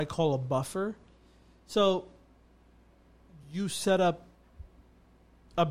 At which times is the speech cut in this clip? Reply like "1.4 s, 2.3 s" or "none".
none